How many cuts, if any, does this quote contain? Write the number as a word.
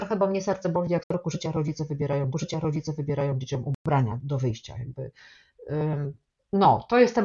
three